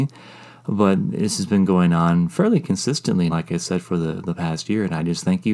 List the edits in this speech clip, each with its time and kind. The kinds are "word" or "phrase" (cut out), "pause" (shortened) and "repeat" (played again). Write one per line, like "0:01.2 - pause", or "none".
0:03.3 - word